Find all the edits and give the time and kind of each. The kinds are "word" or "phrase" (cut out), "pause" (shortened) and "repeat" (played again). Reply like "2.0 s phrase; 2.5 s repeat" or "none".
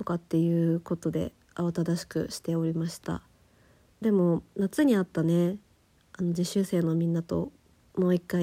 4.0 s phrase